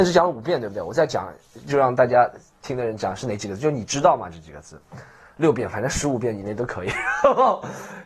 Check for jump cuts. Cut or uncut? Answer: uncut